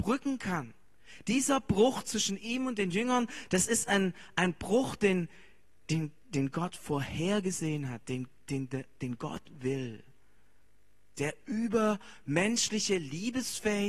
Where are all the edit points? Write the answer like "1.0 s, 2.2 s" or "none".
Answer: none